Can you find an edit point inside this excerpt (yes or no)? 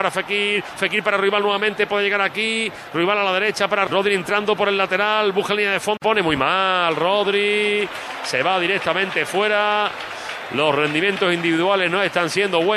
yes